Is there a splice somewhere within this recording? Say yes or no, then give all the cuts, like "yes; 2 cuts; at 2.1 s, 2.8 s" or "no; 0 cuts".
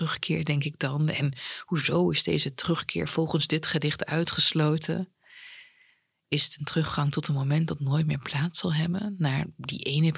no; 0 cuts